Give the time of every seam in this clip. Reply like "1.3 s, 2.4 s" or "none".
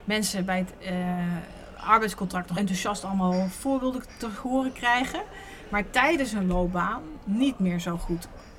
2.6 s

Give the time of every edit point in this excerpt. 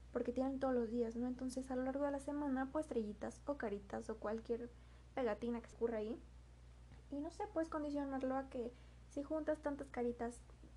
2.7 s, 5.7 s

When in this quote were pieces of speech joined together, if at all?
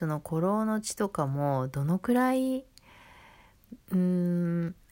3.8 s

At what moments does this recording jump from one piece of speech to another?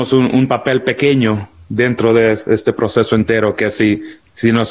none

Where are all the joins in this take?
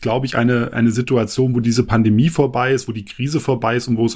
none

